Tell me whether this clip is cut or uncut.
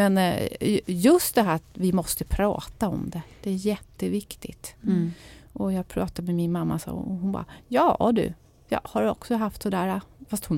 uncut